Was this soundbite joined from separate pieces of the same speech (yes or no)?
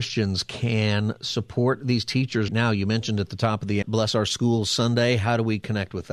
yes